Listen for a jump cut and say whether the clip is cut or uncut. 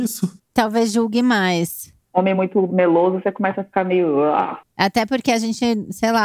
uncut